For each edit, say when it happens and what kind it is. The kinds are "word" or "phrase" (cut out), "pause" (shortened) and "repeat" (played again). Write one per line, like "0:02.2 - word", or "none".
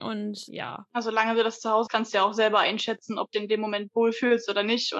0:01.9 - word
0:03.3 - word